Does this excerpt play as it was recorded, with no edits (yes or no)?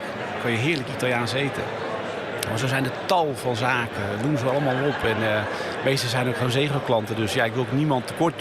yes